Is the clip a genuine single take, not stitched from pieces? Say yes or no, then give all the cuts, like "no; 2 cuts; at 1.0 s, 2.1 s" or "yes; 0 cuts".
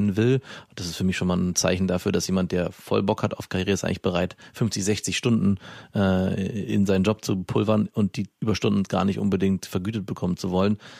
yes; 0 cuts